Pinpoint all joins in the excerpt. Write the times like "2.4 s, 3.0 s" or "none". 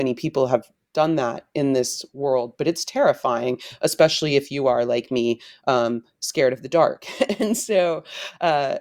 none